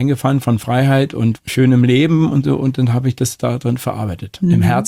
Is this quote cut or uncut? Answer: uncut